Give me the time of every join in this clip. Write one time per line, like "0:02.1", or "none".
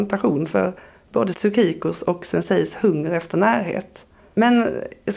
0:04.2